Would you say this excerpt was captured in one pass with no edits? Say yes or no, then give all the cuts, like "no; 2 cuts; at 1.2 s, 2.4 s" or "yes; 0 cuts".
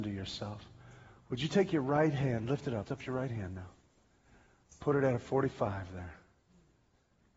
no; 1 cut; at 2.8 s